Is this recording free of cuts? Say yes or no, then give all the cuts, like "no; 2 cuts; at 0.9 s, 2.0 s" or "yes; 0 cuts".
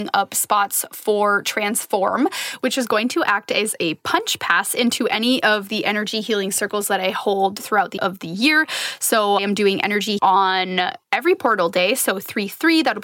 no; 4 cuts; at 8.0 s, 9.4 s, 10.2 s, 11.0 s